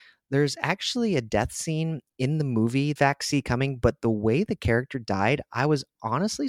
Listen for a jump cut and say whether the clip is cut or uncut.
cut